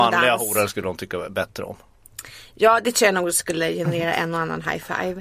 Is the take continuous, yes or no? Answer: yes